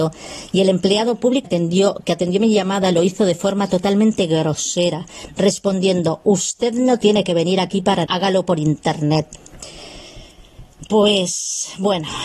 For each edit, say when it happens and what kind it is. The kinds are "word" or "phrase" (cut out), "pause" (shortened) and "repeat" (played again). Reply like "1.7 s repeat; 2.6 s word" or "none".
1.4 s word; 8.1 s word

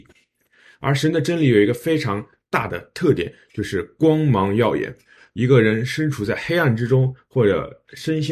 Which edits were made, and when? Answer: none

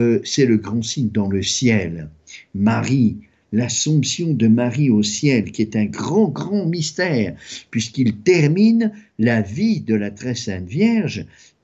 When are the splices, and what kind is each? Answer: none

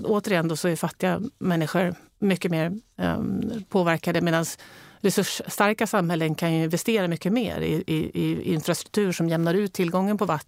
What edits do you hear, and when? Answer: none

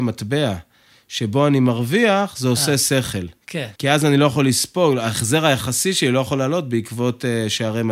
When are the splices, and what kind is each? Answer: 3.8 s pause

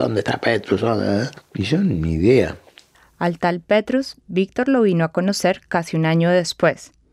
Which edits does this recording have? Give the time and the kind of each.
none

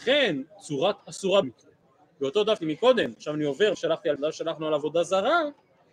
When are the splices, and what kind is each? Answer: 1.0 s word; 1.4 s word; 2.6 s word; 3.7 s word; 4.2 s word

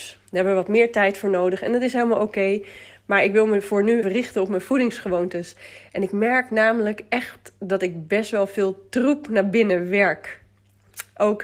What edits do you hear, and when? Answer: 4.0 s word

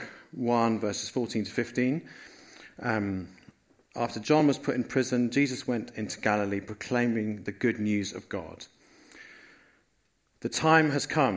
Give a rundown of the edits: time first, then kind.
none

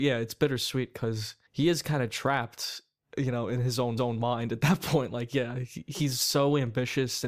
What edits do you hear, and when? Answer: 1.5 s pause; 4.0 s repeat

